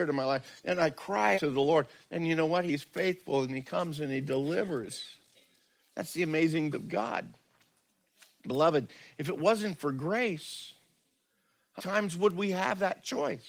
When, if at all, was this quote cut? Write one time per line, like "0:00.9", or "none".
0:01.3
0:06.7
0:11.8